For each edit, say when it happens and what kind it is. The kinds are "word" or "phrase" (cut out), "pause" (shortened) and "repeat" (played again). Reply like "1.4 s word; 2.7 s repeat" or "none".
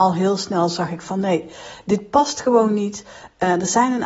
none